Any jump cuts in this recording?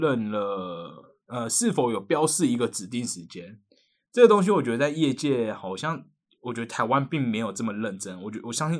no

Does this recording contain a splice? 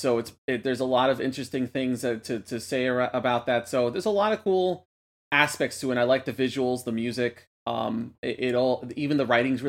no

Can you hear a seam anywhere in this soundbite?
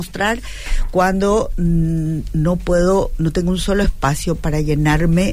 no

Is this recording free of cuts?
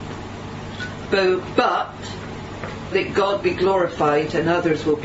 no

